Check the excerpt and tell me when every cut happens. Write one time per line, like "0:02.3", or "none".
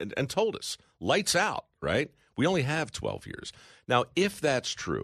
none